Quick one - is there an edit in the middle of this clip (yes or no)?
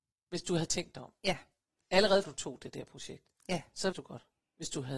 yes